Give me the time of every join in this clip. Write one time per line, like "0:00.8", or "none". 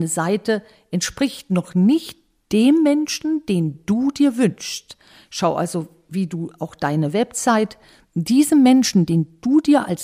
none